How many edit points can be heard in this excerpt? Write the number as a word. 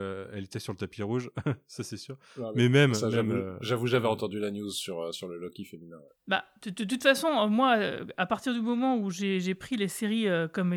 zero